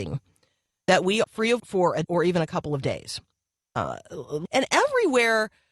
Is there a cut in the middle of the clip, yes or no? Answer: yes